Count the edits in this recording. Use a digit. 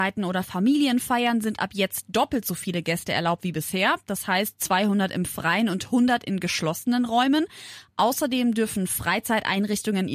0